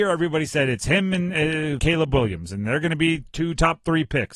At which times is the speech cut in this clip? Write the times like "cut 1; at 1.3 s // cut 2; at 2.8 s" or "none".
cut 1; at 1.8 s // cut 2; at 3.3 s